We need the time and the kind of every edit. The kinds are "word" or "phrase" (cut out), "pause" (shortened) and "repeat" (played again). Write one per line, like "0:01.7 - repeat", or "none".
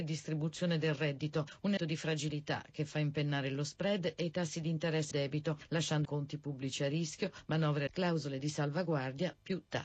0:01.8 - word
0:05.1 - word
0:06.0 - word
0:07.9 - word